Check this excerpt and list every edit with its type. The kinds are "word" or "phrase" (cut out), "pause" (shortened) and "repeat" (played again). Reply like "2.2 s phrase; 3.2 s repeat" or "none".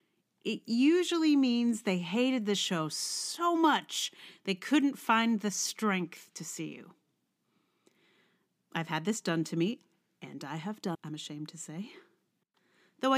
10.9 s word